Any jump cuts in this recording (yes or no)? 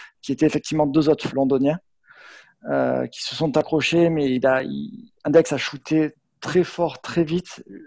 yes